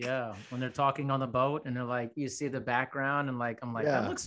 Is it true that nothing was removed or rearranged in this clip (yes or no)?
yes